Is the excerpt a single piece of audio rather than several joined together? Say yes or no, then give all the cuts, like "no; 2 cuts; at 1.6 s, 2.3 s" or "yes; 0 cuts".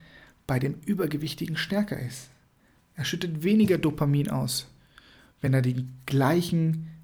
yes; 0 cuts